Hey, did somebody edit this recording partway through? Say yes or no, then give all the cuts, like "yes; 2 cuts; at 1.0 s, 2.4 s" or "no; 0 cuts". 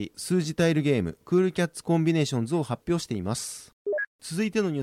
no; 0 cuts